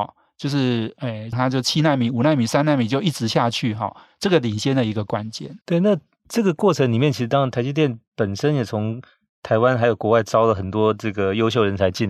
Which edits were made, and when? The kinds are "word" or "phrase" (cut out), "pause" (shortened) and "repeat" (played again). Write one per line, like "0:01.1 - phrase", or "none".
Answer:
0:01.3 - phrase
0:05.6 - pause